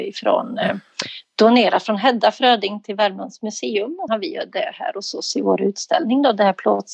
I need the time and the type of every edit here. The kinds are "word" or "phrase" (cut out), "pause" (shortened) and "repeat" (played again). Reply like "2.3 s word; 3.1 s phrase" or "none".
4.1 s word

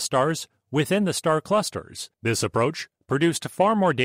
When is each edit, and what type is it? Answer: 2.1 s pause

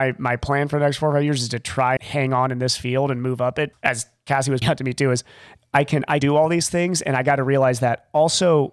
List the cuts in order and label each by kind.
2.0 s word; 3.7 s word; 4.6 s word; 6.2 s word

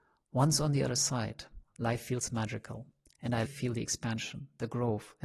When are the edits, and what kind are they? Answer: 3.4 s word

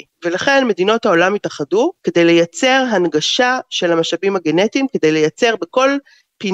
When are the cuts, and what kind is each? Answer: 2.0 s pause

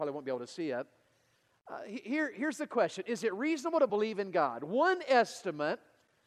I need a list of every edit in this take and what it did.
none

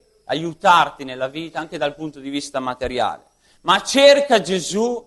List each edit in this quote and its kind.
none

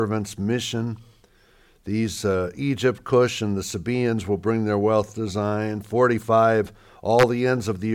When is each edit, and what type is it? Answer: none

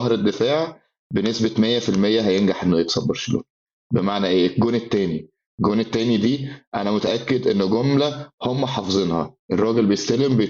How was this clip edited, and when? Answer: none

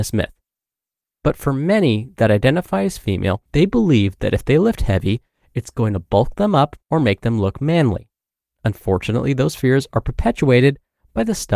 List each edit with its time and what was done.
3.5 s pause; 6.8 s pause

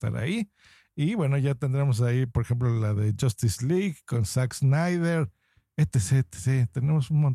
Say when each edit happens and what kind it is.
none

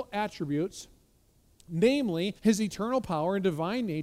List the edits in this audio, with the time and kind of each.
2.4 s pause

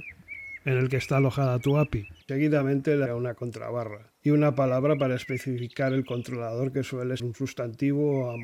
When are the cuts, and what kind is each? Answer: 2.2 s pause; 3.1 s word; 4.2 s pause; 7.2 s word

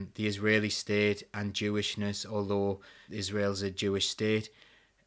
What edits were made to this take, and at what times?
3.1 s word

